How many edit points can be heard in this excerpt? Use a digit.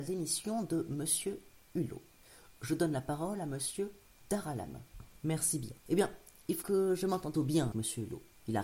4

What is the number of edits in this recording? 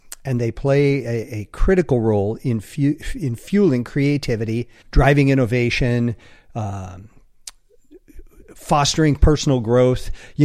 1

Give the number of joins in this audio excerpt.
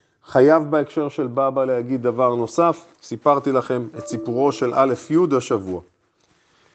1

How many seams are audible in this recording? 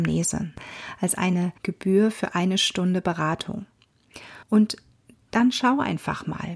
2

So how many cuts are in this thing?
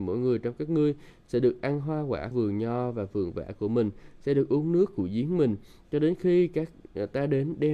1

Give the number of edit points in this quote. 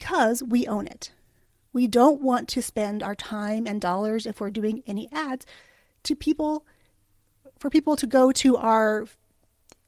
0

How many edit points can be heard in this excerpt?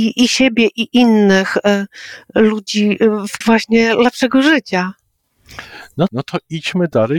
2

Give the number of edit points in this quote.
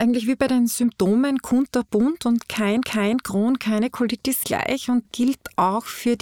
3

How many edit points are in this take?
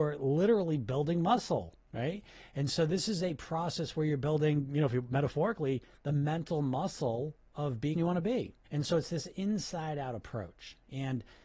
3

